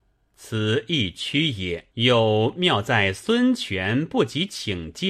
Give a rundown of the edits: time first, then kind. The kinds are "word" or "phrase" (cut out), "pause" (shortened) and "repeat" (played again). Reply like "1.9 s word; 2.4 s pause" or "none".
1.9 s pause

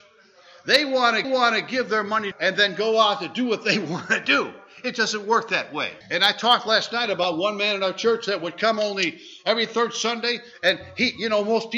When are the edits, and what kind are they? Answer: 1.2 s repeat; 2.3 s phrase; 6.0 s pause

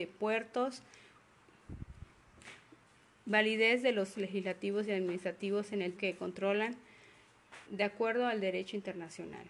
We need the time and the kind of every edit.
4.1 s word; 6.0 s word; 7.7 s word

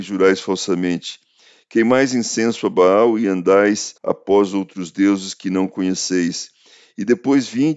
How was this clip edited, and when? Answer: 4.0 s pause

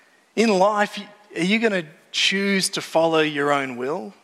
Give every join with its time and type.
none

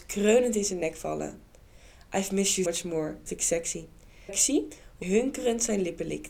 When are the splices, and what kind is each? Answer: 2.6 s word; 3.3 s word; 4.3 s word; 5.0 s word

